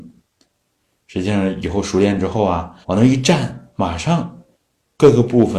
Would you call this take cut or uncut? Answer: cut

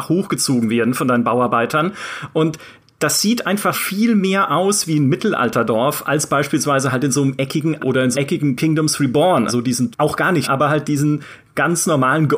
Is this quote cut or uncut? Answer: cut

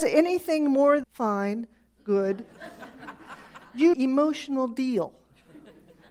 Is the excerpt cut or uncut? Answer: cut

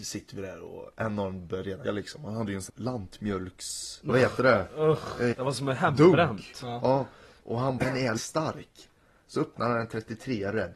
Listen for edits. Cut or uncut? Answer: cut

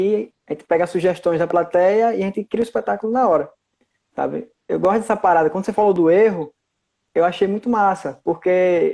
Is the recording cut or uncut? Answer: uncut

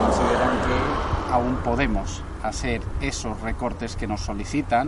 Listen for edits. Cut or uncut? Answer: uncut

